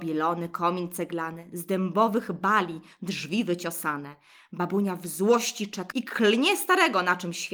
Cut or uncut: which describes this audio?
cut